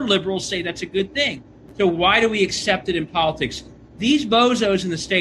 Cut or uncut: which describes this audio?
uncut